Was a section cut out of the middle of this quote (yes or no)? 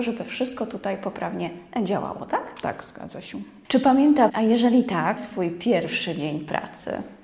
yes